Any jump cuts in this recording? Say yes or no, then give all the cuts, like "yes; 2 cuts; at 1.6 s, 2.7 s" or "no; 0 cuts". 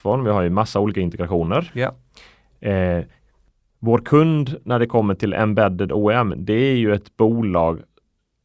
no; 0 cuts